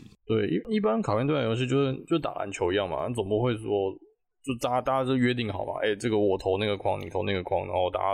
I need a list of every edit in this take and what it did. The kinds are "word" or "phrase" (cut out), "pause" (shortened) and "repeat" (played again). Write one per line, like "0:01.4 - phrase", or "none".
none